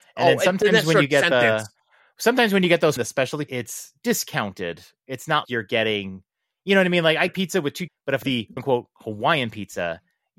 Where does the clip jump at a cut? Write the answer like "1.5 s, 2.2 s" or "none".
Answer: 3.0 s, 3.5 s, 5.4 s, 7.3 s, 7.9 s, 8.2 s, 8.6 s